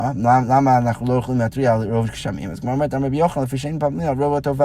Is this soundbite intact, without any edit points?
yes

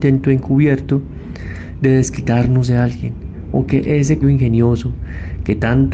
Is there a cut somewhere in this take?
yes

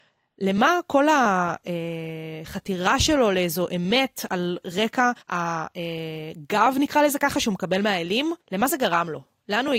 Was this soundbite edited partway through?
yes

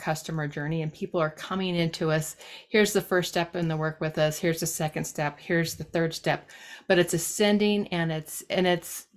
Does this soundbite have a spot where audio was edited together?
no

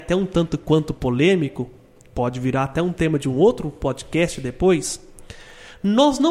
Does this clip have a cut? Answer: no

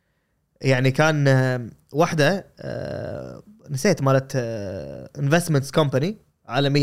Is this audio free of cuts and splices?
yes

